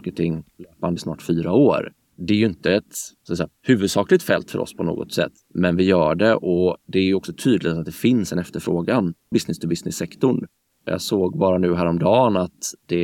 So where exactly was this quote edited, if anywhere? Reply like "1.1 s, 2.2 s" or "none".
1.0 s, 9.3 s